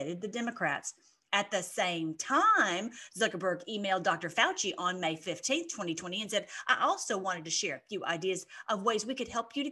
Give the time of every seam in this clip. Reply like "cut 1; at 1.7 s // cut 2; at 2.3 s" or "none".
none